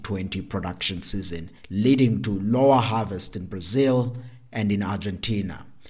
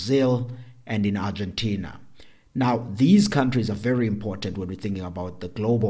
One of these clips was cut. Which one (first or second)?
first